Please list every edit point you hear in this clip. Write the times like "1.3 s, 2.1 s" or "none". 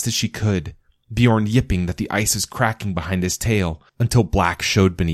3.9 s